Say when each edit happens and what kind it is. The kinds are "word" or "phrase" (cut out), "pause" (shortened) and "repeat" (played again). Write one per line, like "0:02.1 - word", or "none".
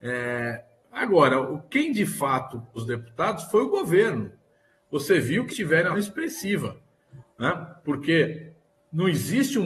0:02.8 - word
0:05.5 - phrase
0:05.9 - phrase